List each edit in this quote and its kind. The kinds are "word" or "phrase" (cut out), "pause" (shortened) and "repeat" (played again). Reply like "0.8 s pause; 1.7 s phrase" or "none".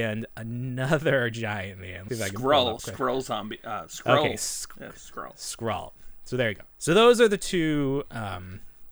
2.1 s phrase; 2.8 s word; 6.7 s pause